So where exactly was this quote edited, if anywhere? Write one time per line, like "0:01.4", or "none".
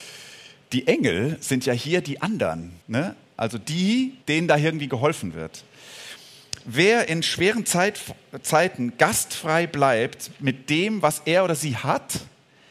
0:02.8
0:04.2